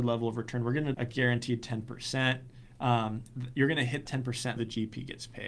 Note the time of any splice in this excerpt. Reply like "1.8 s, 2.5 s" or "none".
0.9 s, 4.1 s, 4.6 s